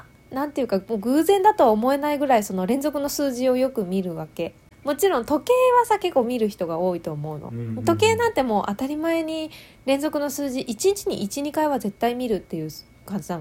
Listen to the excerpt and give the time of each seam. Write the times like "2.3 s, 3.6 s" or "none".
none